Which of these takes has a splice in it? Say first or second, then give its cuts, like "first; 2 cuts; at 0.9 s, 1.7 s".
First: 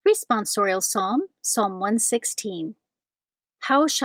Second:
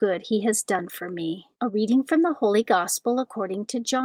second; 1 cut; at 1.5 s